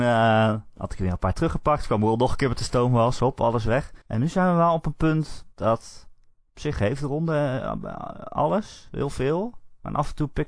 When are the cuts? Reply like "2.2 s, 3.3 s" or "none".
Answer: 4.0 s, 5.5 s